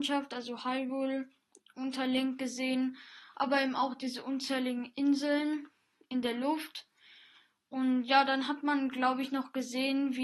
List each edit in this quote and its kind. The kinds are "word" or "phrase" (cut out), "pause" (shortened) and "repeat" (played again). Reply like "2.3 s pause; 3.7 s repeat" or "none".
none